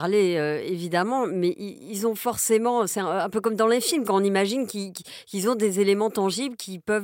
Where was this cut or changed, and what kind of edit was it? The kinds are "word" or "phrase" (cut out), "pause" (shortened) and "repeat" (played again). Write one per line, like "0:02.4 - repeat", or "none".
none